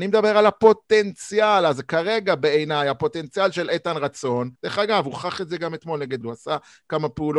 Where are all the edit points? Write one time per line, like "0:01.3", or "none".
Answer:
0:04.6
0:06.2